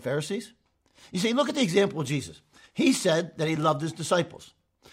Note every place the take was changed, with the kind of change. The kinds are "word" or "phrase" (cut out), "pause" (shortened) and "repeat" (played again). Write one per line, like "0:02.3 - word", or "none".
none

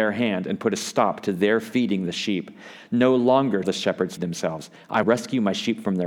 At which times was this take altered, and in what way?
0:03.6 - word
0:04.2 - word
0:05.0 - word

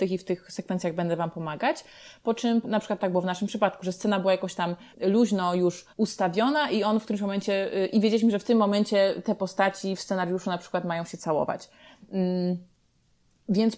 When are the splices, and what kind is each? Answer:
0:02.6 - word
0:04.9 - pause
0:05.9 - pause

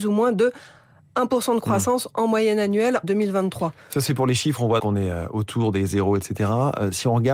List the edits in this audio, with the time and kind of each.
0:03.0 - word
0:04.8 - word

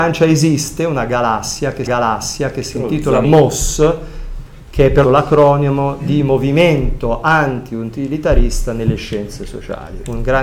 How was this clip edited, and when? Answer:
0:01.9 - repeat
0:03.2 - word
0:05.0 - phrase

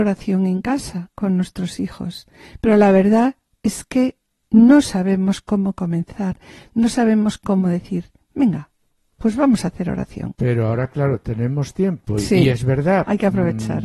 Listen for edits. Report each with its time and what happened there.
none

